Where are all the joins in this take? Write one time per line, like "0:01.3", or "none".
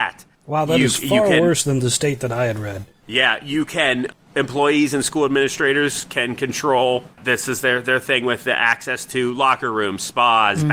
0:07.1